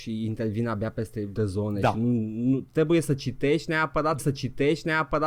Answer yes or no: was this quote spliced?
yes